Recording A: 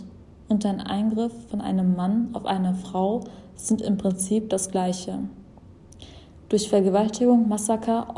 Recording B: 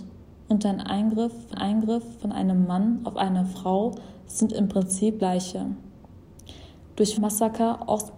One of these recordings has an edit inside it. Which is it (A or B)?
B